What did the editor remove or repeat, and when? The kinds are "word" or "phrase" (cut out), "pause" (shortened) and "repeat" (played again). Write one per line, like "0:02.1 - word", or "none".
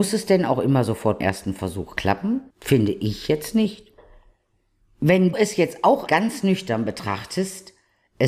0:01.2 - word
0:02.5 - pause
0:05.3 - word
0:06.1 - word

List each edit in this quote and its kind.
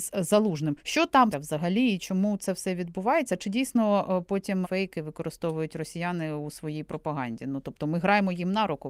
0:01.3 - word
0:04.6 - word

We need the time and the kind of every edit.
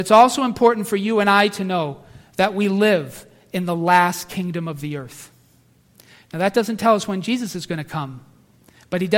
none

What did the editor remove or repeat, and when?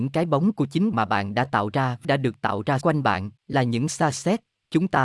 0:00.9 - word
0:02.0 - phrase
0:02.8 - word
0:03.4 - pause

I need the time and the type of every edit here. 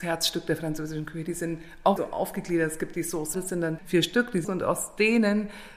0:02.0 - word
0:03.3 - word
0:03.8 - word
0:04.4 - word

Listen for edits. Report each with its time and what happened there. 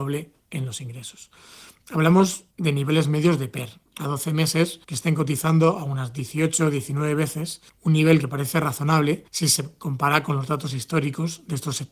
0:02.5 - pause
0:03.9 - pause
0:04.8 - pause
0:07.7 - pause
0:09.3 - pause

